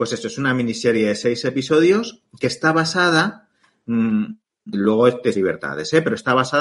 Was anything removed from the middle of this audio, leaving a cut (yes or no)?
yes